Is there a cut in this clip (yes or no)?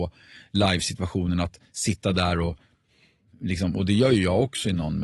no